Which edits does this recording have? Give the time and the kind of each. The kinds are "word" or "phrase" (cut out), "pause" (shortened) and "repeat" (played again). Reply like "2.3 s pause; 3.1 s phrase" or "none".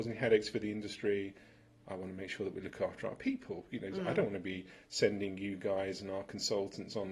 none